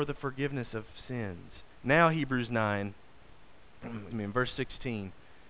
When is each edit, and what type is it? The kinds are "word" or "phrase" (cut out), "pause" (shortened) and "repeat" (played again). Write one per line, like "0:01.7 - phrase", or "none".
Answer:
0:01.7 - pause
0:04.1 - word